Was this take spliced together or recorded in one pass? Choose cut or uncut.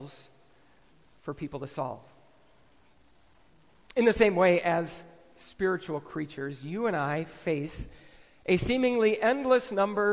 uncut